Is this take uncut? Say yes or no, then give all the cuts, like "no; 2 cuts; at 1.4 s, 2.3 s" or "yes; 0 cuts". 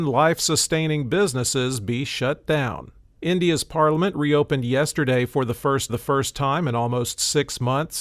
no; 2 cuts; at 3.0 s, 5.9 s